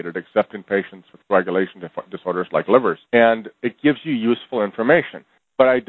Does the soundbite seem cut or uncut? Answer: cut